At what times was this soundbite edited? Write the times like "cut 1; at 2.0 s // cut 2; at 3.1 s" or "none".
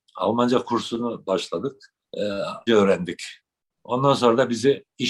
cut 1; at 2.0 s // cut 2; at 2.7 s